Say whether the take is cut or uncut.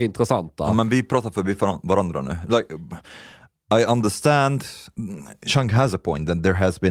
uncut